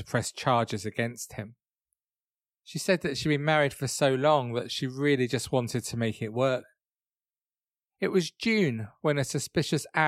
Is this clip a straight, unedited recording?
yes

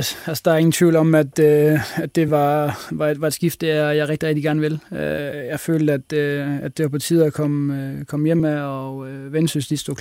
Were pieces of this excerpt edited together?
no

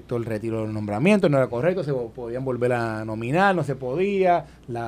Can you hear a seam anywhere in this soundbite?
no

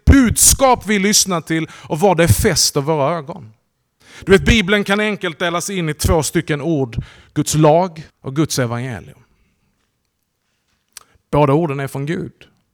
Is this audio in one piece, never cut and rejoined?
no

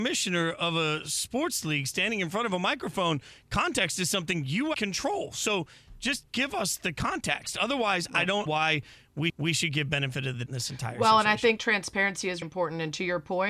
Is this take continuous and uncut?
no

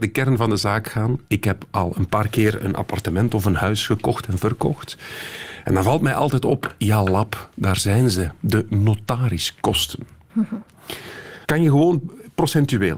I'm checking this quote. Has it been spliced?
yes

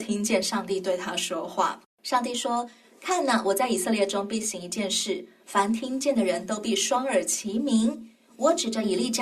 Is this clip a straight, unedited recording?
no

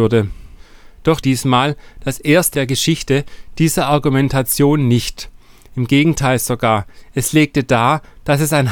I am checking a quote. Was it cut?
yes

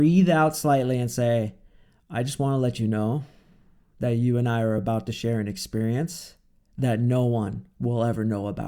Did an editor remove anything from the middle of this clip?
no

